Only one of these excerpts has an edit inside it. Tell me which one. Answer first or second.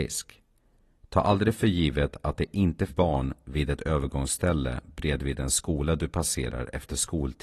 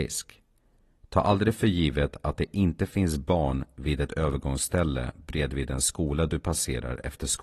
first